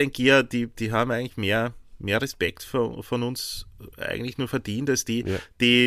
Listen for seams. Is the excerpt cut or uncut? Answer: uncut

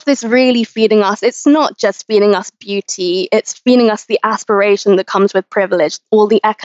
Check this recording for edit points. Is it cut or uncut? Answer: uncut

